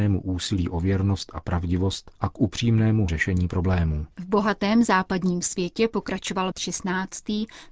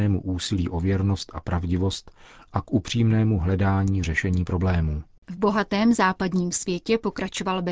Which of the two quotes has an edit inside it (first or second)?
first